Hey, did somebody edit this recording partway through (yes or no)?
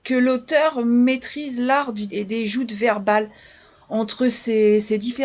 yes